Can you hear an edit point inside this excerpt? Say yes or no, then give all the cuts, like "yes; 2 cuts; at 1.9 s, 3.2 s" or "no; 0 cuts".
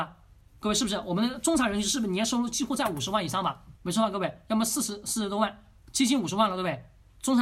yes; 1 cut; at 3.8 s